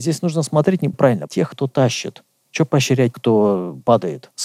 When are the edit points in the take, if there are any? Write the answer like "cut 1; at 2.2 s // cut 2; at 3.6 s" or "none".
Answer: cut 1; at 0.9 s // cut 2; at 1.3 s // cut 3; at 3.1 s

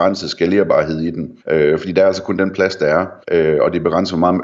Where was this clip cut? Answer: cut 1; at 1.4 s // cut 2; at 3.2 s

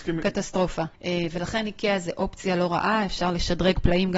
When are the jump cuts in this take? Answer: cut 1; at 0.9 s

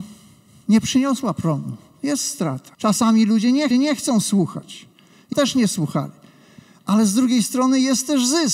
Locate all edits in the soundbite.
cut 1; at 2.7 s // cut 2; at 3.7 s // cut 3; at 5.3 s

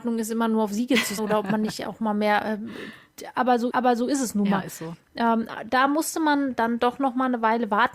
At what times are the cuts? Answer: cut 1; at 1.2 s // cut 2; at 3.7 s

